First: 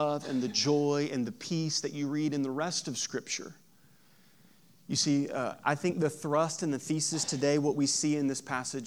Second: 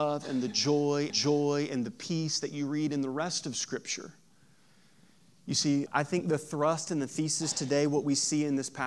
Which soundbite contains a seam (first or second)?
second